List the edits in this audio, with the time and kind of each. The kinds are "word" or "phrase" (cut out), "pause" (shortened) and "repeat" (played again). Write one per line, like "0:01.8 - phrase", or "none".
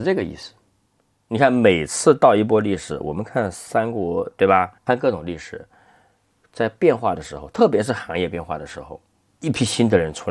0:04.8 - pause